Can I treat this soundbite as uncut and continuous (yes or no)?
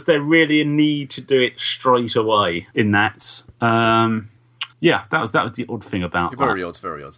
no